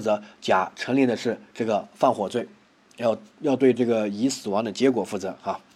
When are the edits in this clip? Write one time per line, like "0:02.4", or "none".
none